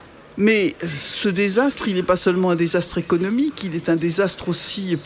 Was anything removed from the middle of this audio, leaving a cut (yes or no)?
no